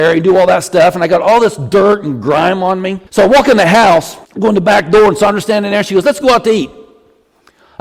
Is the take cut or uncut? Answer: cut